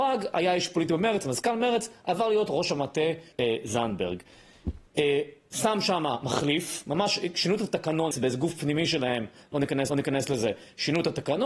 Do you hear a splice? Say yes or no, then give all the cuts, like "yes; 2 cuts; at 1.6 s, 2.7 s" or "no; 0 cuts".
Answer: yes; 4 cuts; at 3.3 s, 4.9 s, 8.1 s, 9.9 s